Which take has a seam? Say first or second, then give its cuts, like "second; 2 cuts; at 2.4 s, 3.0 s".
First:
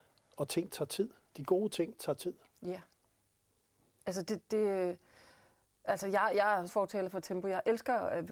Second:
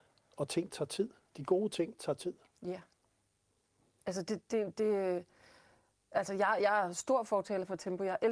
first; 2 cuts; at 4.5 s, 6.7 s